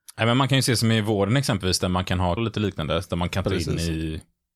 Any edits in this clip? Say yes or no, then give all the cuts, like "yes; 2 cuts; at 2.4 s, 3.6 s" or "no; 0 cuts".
yes; 1 cut; at 2.4 s